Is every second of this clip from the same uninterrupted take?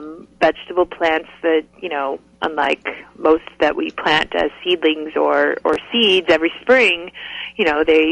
yes; 0 cuts

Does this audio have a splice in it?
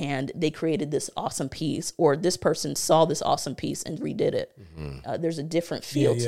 yes; 1 cut; at 4.0 s

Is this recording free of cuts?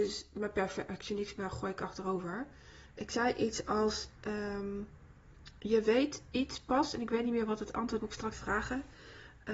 no; 2 cuts; at 8.0 s, 8.3 s

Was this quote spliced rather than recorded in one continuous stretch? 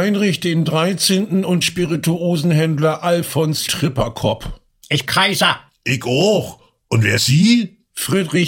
yes; 4 cuts; at 1.6 s, 3.7 s, 5.0 s, 7.2 s

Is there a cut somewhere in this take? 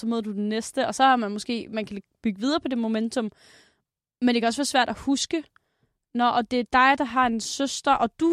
no; 0 cuts

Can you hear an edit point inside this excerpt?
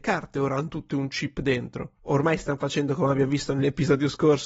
no; 0 cuts

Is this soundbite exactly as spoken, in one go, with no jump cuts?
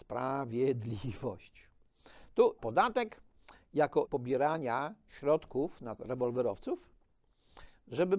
no; 3 cuts; at 2.6 s, 4.1 s, 6.0 s

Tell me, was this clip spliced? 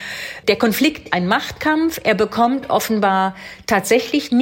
yes; 1 cut; at 1.1 s

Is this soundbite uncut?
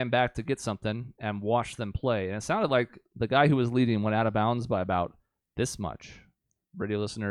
yes; 0 cuts

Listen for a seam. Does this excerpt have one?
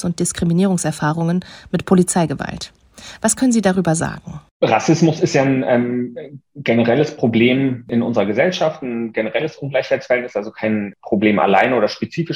yes; 1 cut; at 4.5 s

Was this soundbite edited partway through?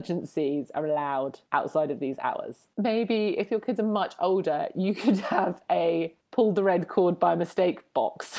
yes; 3 cuts; at 1.5 s, 2.7 s, 6.2 s

